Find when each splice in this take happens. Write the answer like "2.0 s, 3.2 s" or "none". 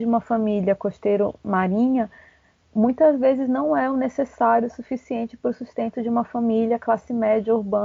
none